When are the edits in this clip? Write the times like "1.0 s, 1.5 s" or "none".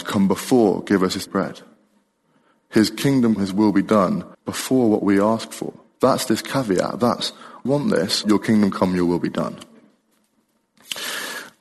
1.3 s, 3.4 s, 4.3 s, 7.7 s, 8.2 s

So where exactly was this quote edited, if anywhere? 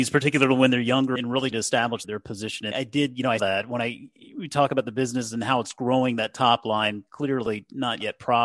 1.2 s, 1.5 s, 2.0 s, 2.7 s, 3.4 s

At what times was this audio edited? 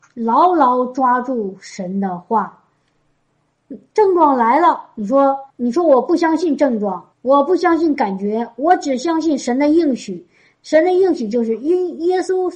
5.5 s, 7.1 s

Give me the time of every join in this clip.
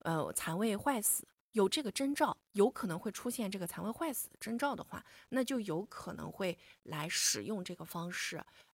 2.4 s

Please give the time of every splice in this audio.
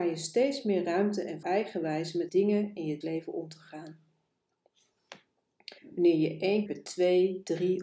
1.4 s, 2.3 s, 3.0 s, 5.8 s, 6.7 s

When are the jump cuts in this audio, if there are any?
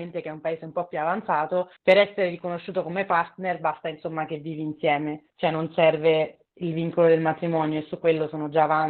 1.8 s, 5.3 s

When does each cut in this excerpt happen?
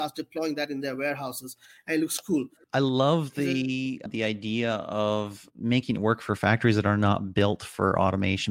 none

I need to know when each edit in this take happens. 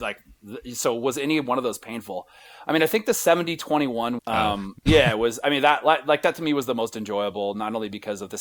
4.2 s, 4.8 s

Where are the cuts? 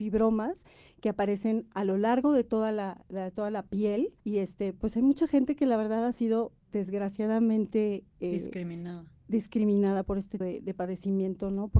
4.2 s, 10.4 s

